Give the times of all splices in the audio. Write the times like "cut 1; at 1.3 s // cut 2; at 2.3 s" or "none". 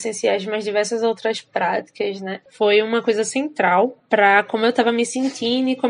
none